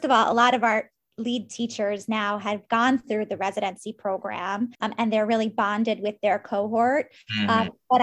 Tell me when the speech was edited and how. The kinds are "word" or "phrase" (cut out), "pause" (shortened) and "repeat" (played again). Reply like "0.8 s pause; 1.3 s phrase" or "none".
4.7 s pause